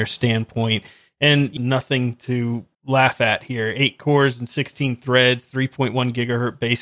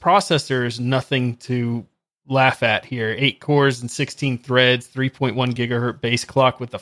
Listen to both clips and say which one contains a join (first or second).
first